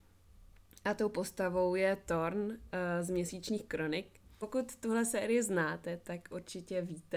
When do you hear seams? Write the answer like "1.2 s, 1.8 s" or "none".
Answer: none